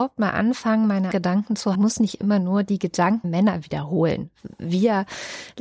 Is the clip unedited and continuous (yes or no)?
no